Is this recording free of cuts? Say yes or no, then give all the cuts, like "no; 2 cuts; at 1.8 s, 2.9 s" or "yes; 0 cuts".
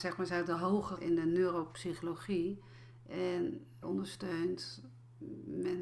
no; 2 cuts; at 1.0 s, 3.8 s